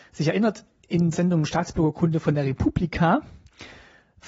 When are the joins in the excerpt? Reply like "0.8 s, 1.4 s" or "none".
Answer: 1.1 s